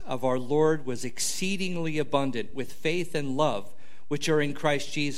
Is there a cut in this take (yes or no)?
no